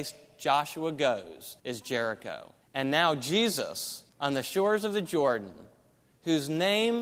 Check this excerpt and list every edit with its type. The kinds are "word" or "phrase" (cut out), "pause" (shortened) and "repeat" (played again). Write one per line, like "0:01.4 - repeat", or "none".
0:01.6 - pause
0:02.6 - pause
0:04.1 - pause